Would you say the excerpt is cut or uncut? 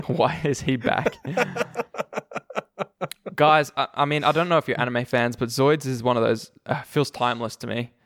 uncut